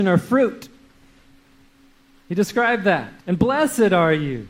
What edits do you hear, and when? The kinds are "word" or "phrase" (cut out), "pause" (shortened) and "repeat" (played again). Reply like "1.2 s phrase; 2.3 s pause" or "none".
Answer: 3.2 s pause